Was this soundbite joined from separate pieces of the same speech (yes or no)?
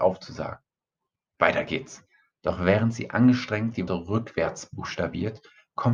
yes